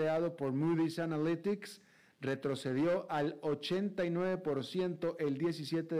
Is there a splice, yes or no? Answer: no